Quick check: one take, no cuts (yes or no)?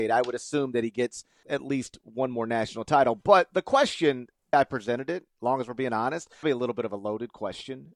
no